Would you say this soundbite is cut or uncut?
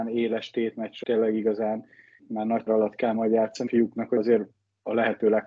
cut